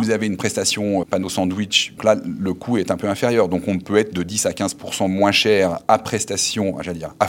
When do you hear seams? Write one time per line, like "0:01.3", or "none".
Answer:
0:01.0
0:02.0